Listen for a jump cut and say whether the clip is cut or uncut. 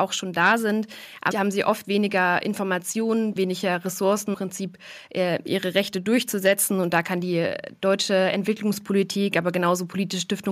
cut